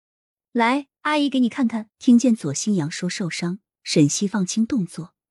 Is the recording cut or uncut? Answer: cut